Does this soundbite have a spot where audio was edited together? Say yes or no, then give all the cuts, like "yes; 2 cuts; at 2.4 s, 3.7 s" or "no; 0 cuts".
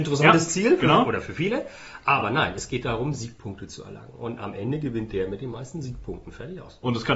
no; 0 cuts